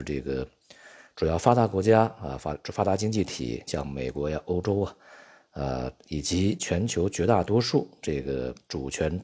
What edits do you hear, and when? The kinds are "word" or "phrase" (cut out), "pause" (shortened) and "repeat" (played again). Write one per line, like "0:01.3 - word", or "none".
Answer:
none